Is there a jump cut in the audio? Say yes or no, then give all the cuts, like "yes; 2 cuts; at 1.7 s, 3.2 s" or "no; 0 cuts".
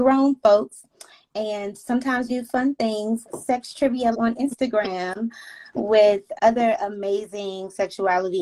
yes; 4 cuts; at 2.3 s, 3.2 s, 4.1 s, 6.4 s